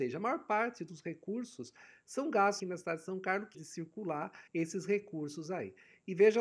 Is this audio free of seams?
no; 3 cuts; at 2.6 s, 3.5 s, 4.5 s

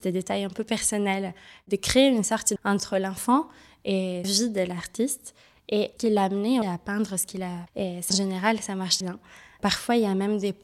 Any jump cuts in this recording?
yes; 7 cuts; at 2.6 s, 4.2 s, 6.0 s, 6.6 s, 7.7 s, 8.1 s, 9.0 s

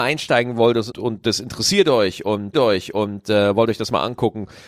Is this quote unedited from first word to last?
no; 2 cuts; at 0.9 s, 2.5 s

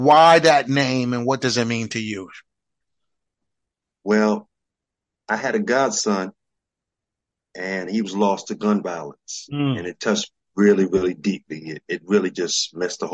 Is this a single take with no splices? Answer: yes; 0 cuts

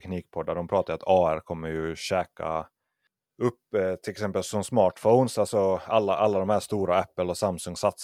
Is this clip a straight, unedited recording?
yes; 0 cuts

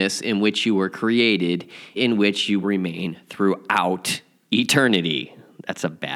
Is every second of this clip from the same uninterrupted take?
no; 2 cuts; at 2.0 s, 2.6 s

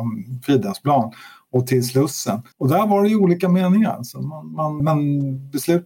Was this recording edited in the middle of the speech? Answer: yes; 2 cuts; at 2.5 s, 4.8 s

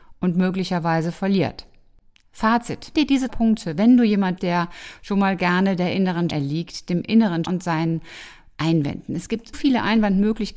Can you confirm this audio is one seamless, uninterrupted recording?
no; 7 cuts; at 2.9 s, 3.3 s, 4.4 s, 5.4 s, 6.3 s, 7.4 s, 9.5 s

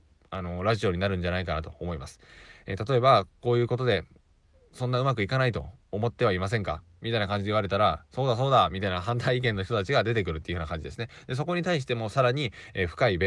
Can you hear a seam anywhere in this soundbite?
no; 0 cuts

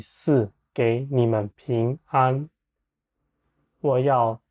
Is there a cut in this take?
no; 0 cuts

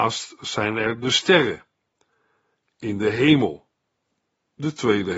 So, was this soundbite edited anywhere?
no; 0 cuts

